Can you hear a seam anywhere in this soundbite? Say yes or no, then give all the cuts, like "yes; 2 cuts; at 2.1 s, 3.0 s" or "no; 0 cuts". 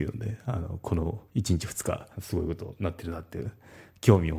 yes; 2 cuts; at 1.3 s, 2.1 s